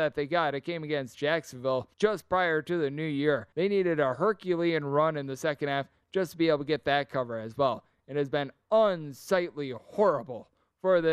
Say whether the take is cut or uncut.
cut